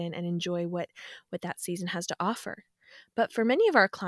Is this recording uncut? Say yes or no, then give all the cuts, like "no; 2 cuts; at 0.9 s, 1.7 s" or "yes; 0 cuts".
yes; 0 cuts